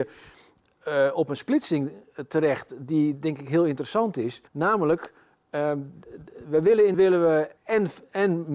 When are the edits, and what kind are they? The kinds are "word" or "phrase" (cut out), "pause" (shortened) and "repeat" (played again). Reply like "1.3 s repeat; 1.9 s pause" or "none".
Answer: 4.5 s pause; 6.9 s word; 7.6 s pause